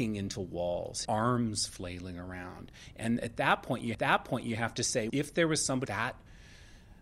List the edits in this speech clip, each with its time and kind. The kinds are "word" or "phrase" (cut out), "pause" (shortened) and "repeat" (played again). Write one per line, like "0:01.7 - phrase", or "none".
0:01.0 - word
0:03.9 - repeat
0:05.1 - word
0:05.8 - word